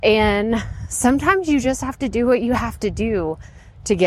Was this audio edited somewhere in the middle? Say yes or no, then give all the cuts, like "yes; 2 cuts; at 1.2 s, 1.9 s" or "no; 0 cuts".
no; 0 cuts